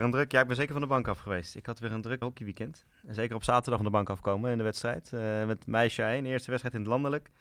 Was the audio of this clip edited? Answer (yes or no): yes